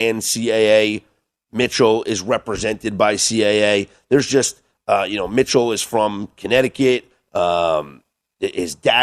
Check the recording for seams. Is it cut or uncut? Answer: uncut